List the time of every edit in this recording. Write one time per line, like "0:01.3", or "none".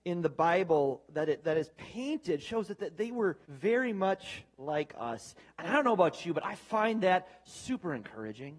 0:03.4